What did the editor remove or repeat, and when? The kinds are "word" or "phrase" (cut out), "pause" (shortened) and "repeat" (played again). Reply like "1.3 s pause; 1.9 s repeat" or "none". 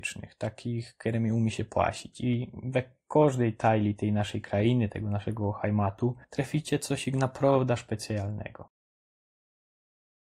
6.2 s pause